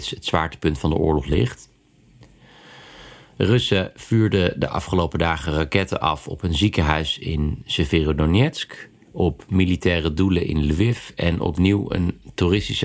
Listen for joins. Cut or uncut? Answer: uncut